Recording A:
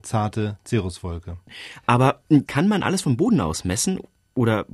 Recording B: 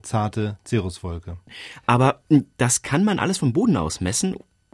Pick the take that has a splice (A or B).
A